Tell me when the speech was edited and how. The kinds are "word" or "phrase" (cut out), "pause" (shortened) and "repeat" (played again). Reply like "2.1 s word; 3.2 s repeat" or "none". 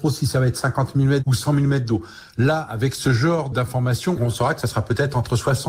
1.2 s word